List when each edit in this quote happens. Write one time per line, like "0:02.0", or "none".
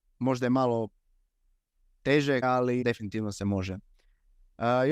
0:02.4
0:02.8